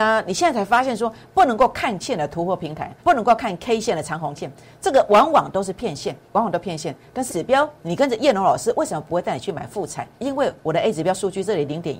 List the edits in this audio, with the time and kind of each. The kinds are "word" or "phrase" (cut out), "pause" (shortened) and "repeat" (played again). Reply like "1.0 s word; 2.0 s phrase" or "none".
2.0 s word; 3.0 s pause; 4.4 s word; 6.2 s pause; 7.3 s word; 10.1 s pause; 10.6 s pause